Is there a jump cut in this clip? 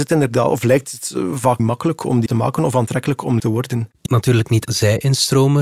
yes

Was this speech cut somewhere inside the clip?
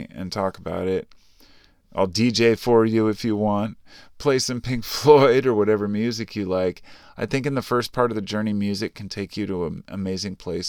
no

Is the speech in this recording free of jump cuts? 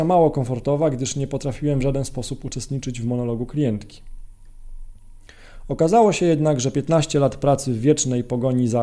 yes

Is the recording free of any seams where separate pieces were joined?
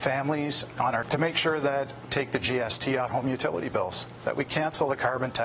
no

